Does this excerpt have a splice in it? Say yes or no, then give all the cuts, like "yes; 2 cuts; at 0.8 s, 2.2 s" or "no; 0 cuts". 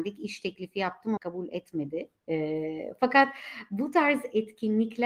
yes; 1 cut; at 1.2 s